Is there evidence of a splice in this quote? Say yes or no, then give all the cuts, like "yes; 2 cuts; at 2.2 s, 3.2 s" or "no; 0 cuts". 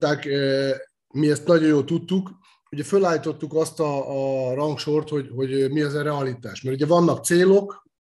no; 0 cuts